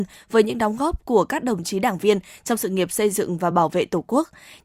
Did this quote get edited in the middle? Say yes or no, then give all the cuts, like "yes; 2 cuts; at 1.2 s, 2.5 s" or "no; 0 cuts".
no; 0 cuts